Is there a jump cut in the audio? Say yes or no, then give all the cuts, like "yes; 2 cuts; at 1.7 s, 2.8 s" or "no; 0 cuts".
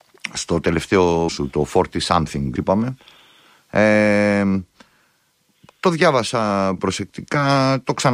yes; 3 cuts; at 1.3 s, 2.6 s, 6.8 s